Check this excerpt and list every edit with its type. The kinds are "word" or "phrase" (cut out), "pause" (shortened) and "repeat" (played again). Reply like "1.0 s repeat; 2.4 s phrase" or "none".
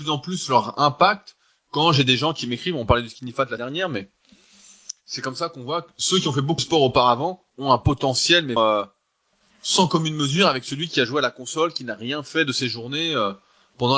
3.6 s word; 6.6 s word; 8.6 s word